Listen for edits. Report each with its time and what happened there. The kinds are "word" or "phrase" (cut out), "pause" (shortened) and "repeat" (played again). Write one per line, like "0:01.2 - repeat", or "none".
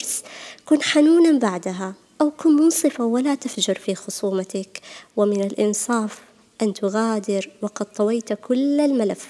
none